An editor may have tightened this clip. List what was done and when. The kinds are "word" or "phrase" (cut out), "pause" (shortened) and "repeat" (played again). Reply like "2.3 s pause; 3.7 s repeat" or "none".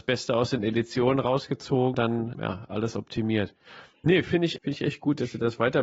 1.9 s word; 2.3 s word; 4.6 s word